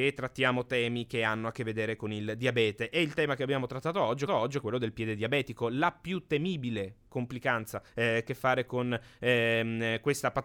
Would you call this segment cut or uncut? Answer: cut